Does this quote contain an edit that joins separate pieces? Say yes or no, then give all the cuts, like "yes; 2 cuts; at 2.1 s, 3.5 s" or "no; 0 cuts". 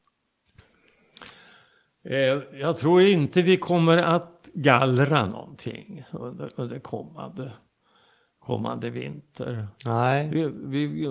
no; 0 cuts